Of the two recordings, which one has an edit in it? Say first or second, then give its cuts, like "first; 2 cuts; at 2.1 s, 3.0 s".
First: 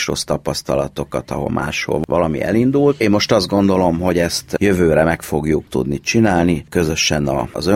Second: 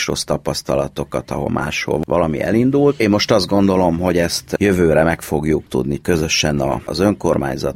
second; 1 cut; at 6.0 s